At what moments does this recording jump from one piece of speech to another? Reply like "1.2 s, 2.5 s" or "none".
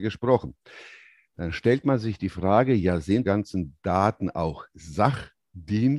3.2 s